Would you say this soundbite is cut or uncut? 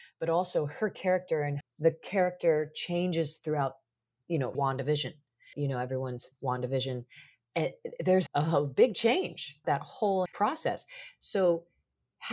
cut